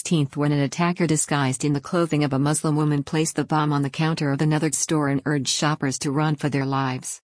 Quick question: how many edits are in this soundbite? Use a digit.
1